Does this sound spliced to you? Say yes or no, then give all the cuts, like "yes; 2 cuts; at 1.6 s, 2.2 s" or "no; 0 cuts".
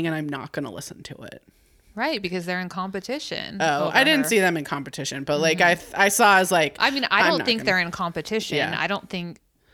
no; 0 cuts